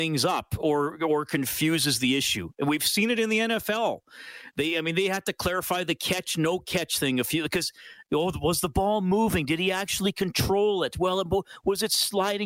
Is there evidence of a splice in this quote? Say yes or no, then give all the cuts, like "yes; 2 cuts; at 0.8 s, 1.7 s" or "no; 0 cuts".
no; 0 cuts